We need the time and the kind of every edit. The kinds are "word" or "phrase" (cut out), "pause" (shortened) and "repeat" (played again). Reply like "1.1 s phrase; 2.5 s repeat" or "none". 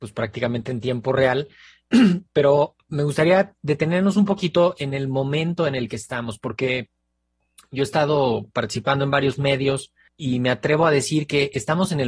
10.1 s word